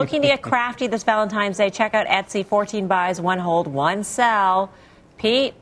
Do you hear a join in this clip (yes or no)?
no